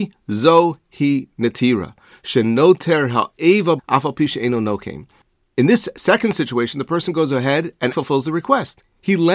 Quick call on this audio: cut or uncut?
cut